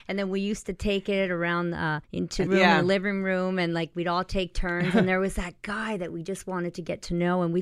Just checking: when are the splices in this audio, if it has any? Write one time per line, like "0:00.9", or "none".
0:02.0
0:02.5